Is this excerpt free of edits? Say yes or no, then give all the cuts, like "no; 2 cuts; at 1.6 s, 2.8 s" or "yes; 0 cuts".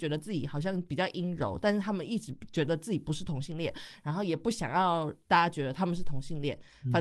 yes; 0 cuts